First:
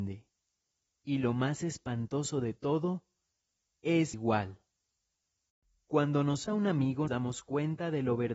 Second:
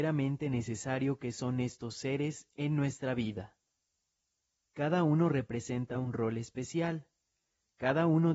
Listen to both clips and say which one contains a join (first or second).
first